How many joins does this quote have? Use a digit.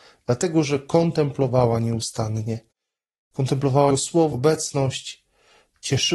2